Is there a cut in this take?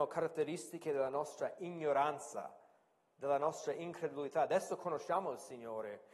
no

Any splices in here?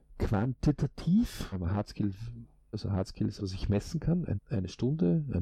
yes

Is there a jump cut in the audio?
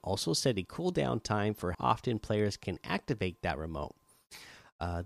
yes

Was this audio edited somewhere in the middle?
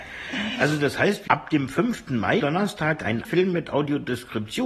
yes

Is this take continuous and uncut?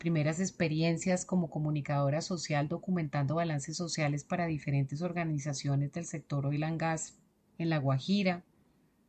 yes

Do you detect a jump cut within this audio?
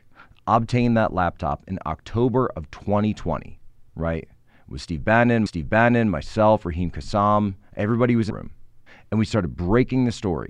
yes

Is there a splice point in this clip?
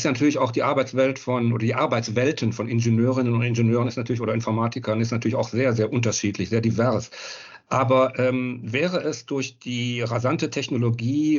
no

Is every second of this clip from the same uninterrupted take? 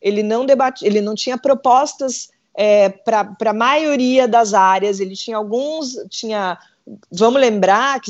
yes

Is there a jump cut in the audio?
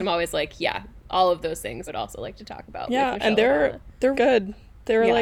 yes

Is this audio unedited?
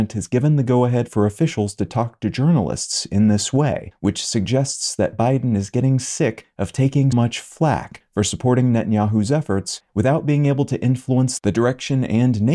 no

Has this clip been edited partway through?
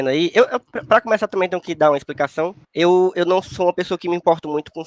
yes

